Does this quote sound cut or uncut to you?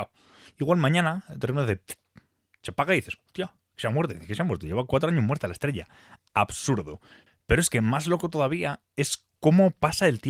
uncut